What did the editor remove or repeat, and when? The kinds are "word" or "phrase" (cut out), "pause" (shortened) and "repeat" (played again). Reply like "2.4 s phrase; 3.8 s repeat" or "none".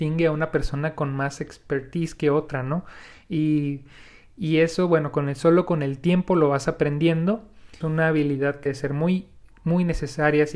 7.8 s phrase; 8.7 s word